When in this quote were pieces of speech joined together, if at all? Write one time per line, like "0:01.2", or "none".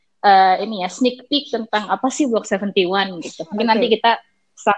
none